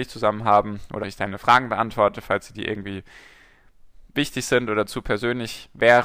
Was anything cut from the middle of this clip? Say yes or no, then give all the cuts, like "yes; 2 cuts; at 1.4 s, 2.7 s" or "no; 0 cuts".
yes; 2 cuts; at 1.0 s, 4.1 s